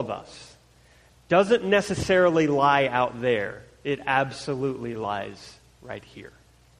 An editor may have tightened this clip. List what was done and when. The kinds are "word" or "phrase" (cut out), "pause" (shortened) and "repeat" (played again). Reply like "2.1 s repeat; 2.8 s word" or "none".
none